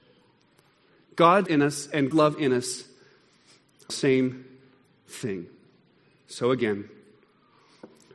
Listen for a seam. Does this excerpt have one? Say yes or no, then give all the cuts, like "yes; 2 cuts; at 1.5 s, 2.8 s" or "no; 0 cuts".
yes; 3 cuts; at 1.5 s, 2.1 s, 3.9 s